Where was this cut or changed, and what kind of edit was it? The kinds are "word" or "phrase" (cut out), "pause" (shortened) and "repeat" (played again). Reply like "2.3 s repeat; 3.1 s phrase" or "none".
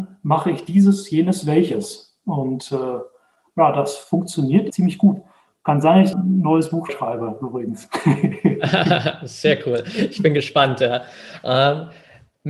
4.7 s word; 6.1 s phrase; 6.9 s word